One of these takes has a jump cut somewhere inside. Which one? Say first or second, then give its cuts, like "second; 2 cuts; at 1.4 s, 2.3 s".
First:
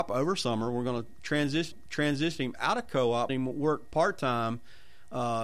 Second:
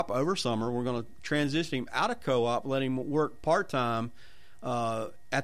first; 2 cuts; at 1.7 s, 3.3 s